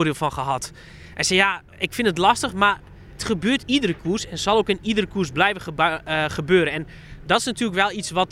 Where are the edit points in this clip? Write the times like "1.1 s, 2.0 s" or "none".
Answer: 1.7 s, 3.2 s, 3.6 s